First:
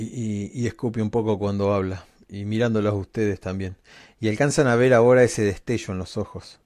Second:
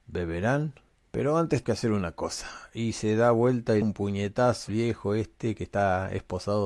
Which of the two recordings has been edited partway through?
second; 4 cuts; at 1.0 s, 1.6 s, 3.8 s, 4.7 s

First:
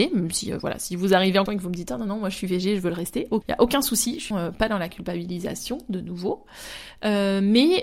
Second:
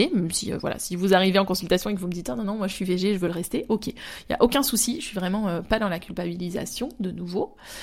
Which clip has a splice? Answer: first; 3 cuts; at 1.5 s, 3.4 s, 4.3 s

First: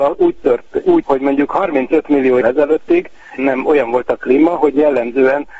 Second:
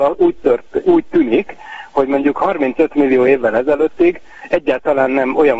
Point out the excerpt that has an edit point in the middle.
first; 3 cuts; at 1.0 s, 2.4 s, 3.4 s

